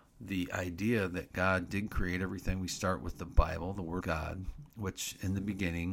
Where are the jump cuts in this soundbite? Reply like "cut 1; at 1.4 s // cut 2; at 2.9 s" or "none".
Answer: cut 1; at 4.0 s